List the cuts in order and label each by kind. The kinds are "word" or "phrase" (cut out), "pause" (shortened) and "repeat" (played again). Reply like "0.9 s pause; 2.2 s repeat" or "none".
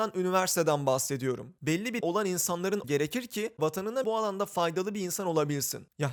2.0 s word; 2.8 s word; 3.6 s word; 4.0 s word